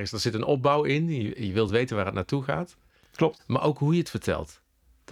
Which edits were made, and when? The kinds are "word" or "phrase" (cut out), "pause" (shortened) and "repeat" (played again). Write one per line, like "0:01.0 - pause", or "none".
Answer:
none